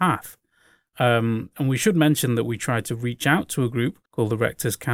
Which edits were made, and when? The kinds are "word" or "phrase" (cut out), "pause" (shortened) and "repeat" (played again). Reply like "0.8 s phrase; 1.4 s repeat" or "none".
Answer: 4.1 s pause